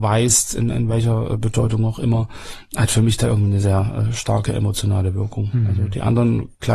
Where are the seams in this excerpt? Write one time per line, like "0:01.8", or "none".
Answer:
0:03.6